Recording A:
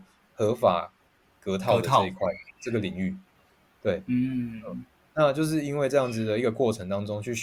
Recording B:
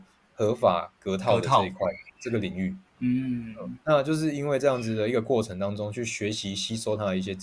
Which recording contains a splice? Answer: B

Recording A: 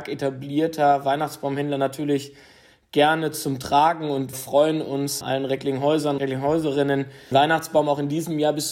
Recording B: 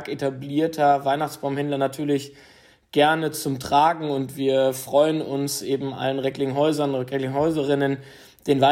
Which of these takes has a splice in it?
A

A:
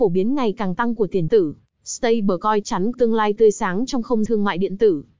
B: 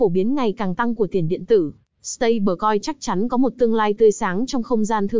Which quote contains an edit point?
A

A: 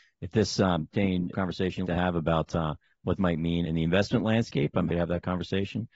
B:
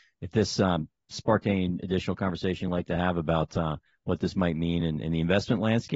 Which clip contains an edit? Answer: A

